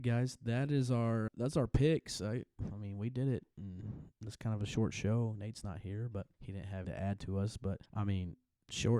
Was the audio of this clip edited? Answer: yes; 5 cuts; at 1.3 s, 4.1 s, 6.3 s, 6.8 s, 7.9 s

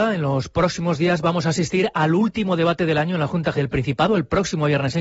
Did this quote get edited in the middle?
yes; 1 cut; at 3.5 s

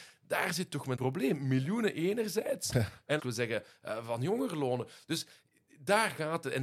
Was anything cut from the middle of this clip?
yes; 2 cuts; at 1.0 s, 3.2 s

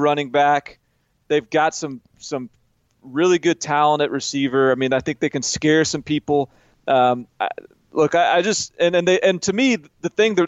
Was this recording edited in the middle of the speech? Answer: no; 0 cuts

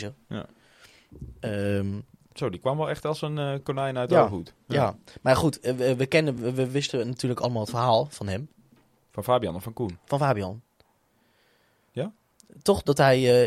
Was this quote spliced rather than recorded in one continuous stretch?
no; 0 cuts

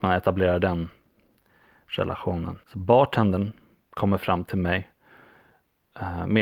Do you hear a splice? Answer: yes; 1 cut; at 2.6 s

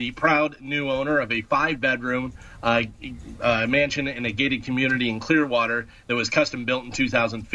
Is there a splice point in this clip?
no; 0 cuts

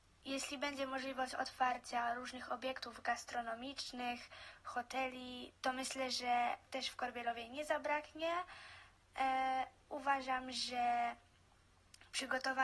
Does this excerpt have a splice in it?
yes; 1 cut; at 6.7 s

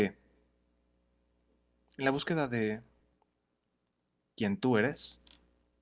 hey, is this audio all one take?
yes; 0 cuts

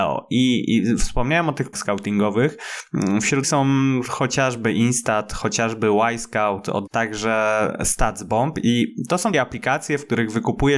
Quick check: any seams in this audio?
yes; 4 cuts; at 1.7 s, 3.4 s, 6.9 s, 9.3 s

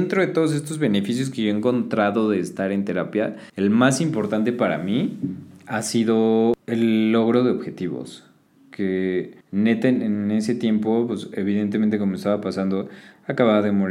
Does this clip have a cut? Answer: yes; 3 cuts; at 3.5 s, 6.6 s, 9.4 s

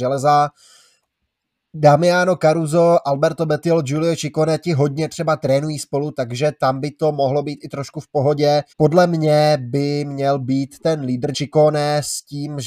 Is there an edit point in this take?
yes; 2 cuts; at 8.7 s, 11.3 s

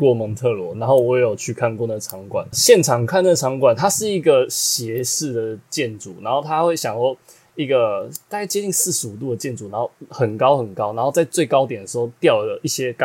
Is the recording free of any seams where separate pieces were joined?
no; 1 cut; at 2.5 s

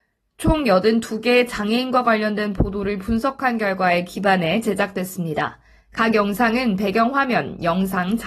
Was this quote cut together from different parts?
no; 0 cuts

